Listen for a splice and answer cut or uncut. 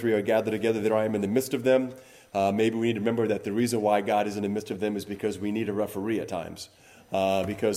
uncut